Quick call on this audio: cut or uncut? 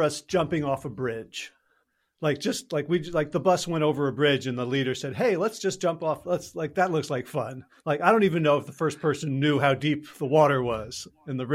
uncut